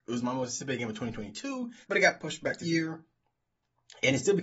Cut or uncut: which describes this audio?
cut